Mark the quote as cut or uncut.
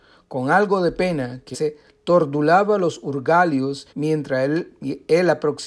cut